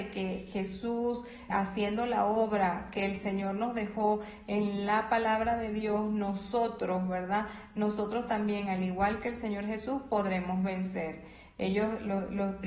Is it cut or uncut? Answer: cut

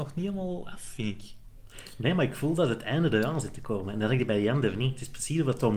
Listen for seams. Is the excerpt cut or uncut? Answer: uncut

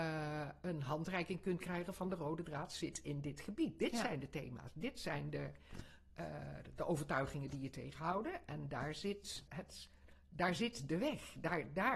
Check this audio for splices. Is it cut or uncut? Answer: cut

